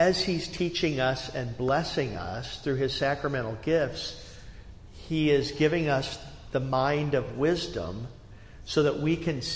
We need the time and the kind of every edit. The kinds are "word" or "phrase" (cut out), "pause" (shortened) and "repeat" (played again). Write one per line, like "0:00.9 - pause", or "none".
none